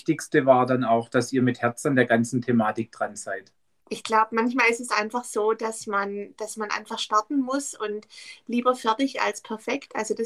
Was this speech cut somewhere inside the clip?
no; 0 cuts

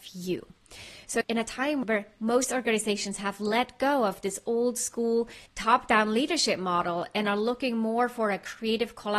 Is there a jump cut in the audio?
yes; 1 cut; at 5.5 s

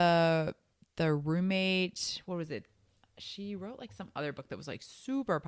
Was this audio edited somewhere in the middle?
no; 0 cuts

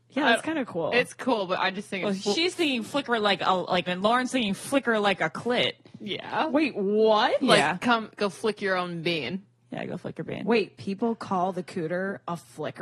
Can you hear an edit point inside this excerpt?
yes; 1 cut; at 3.9 s

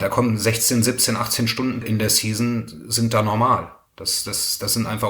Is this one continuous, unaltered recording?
no; 1 cut; at 1.8 s

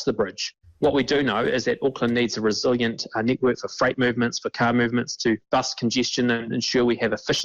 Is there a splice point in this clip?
no; 0 cuts

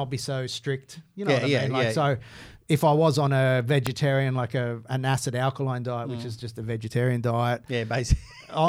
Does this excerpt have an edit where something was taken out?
no; 0 cuts

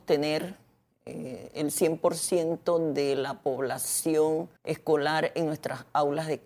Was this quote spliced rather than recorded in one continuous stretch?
yes; 1 cut; at 4.6 s

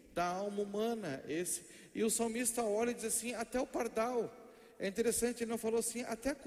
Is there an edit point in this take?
no; 0 cuts

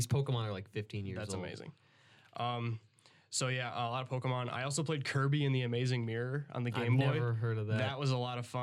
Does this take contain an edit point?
no; 0 cuts

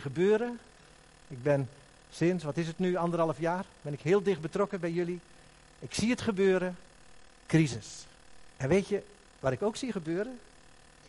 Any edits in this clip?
yes; 1 cut; at 8.5 s

